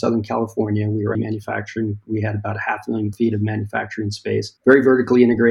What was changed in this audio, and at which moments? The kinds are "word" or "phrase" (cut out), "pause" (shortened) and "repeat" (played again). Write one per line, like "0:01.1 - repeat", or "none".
0:01.1 - word
0:03.1 - word
0:04.6 - pause